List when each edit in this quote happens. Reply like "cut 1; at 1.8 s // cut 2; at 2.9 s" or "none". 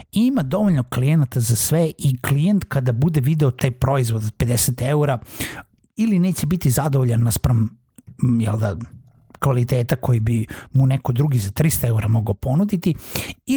cut 1; at 3.6 s